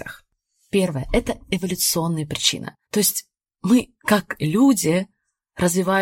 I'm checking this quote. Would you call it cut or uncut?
cut